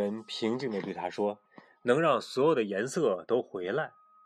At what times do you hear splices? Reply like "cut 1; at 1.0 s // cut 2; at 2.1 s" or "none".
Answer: cut 1; at 1.5 s